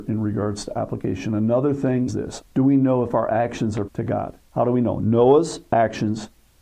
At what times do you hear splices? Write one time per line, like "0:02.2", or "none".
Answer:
0:02.1
0:02.4
0:03.9
0:04.5